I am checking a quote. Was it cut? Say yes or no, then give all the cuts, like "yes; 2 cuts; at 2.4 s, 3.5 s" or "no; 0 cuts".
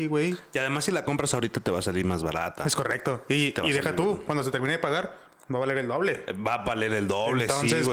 no; 0 cuts